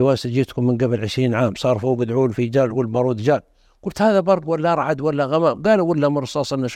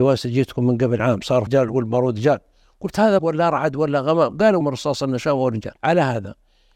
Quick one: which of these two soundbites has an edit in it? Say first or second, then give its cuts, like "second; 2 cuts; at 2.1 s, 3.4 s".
second; 5 cuts; at 1.0 s, 1.5 s, 3.2 s, 4.6 s, 5.8 s